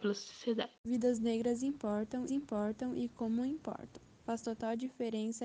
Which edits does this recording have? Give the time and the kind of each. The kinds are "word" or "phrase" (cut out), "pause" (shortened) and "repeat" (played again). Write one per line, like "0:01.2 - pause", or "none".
0:02.3 - repeat